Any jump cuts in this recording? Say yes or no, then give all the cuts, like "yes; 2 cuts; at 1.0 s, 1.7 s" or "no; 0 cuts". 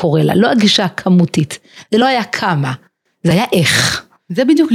no; 0 cuts